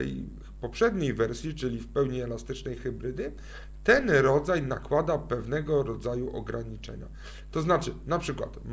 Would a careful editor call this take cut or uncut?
uncut